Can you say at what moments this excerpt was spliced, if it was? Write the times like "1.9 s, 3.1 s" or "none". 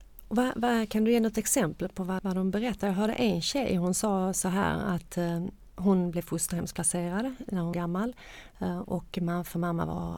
2.2 s, 7.7 s